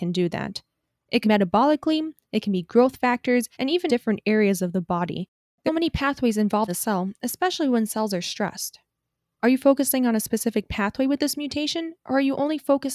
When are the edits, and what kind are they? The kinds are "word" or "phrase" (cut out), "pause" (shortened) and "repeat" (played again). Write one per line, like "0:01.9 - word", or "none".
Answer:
0:01.2 - word
0:03.5 - pause
0:03.9 - word
0:05.7 - phrase
0:06.7 - word